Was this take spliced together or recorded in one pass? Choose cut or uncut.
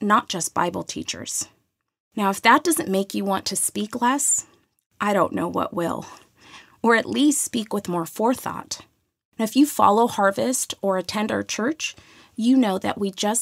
uncut